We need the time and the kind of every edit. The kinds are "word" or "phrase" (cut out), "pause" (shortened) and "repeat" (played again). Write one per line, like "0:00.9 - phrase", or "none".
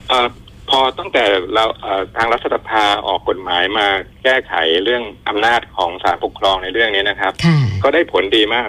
none